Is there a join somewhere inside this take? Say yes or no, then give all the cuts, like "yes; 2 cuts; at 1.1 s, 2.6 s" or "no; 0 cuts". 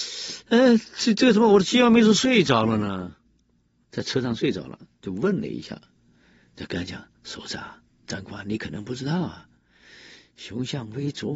yes; 1 cut; at 3.8 s